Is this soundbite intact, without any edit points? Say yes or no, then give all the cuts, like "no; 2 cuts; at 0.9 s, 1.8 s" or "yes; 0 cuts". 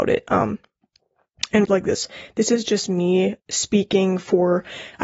no; 2 cuts; at 1.6 s, 3.4 s